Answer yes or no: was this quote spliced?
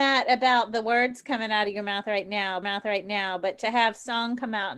yes